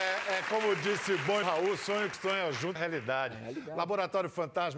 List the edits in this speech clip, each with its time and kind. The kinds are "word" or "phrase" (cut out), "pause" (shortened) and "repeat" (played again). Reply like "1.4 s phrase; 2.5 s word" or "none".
1.4 s phrase; 2.1 s word; 2.8 s word